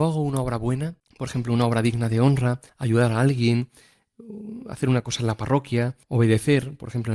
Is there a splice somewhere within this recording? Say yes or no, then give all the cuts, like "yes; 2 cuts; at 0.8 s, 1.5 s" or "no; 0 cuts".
yes; 3 cuts; at 1.0 s, 2.7 s, 6.0 s